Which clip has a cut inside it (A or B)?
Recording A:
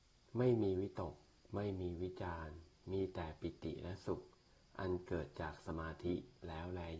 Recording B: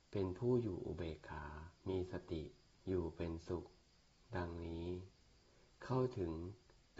B